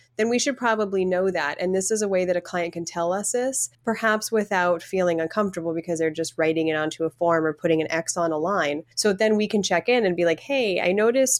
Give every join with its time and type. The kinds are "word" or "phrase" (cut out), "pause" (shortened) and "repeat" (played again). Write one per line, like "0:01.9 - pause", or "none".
0:03.7 - pause
0:08.9 - pause